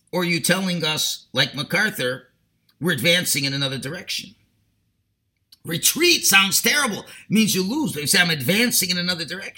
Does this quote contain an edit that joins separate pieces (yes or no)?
no